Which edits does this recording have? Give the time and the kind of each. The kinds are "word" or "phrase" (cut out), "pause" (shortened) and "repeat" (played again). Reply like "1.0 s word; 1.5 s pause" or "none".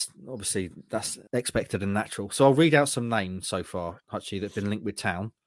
1.3 s pause